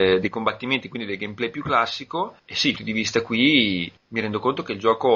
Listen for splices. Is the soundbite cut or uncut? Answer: cut